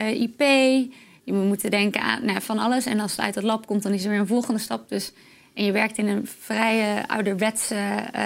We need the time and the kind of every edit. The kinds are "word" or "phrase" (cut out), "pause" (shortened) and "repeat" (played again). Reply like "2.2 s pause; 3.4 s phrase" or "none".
none